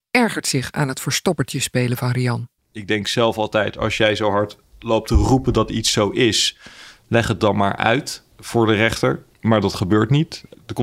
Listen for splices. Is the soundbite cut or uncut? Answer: cut